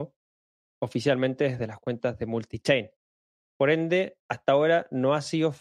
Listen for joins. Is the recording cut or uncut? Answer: uncut